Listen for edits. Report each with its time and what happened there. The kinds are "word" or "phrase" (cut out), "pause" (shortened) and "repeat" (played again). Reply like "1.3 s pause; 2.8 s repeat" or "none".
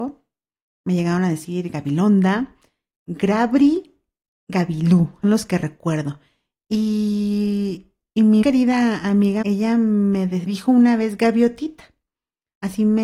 5.2 s word; 8.4 s word; 9.4 s word; 10.5 s word